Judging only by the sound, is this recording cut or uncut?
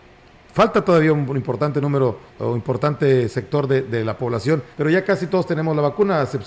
cut